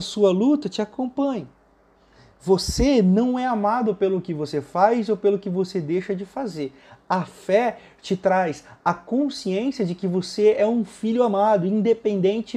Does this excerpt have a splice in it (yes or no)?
no